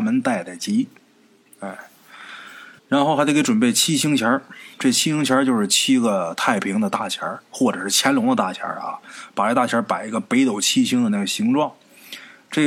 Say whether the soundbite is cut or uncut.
cut